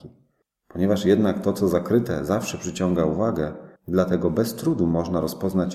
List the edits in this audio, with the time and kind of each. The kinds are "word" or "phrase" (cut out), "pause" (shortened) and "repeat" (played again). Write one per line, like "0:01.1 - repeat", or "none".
0:03.8 - pause